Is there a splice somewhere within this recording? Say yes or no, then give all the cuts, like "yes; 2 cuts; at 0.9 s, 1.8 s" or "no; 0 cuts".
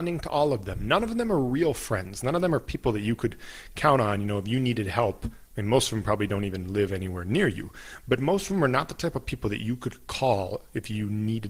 no; 0 cuts